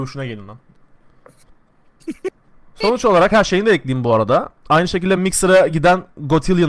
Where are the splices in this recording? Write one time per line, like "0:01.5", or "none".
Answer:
none